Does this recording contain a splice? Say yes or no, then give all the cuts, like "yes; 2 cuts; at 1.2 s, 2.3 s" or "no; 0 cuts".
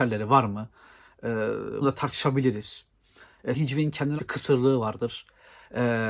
yes; 3 cuts; at 1.8 s, 3.5 s, 4.2 s